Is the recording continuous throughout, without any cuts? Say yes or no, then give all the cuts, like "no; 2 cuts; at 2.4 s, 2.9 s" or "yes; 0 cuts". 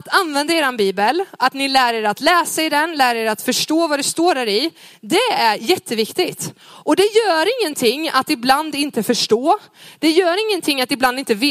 yes; 0 cuts